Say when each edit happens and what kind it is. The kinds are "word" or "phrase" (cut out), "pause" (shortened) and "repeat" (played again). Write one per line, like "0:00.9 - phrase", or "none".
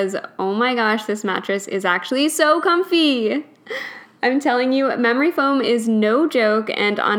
none